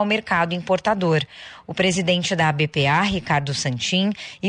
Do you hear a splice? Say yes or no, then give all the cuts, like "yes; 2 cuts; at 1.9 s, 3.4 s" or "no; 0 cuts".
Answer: no; 0 cuts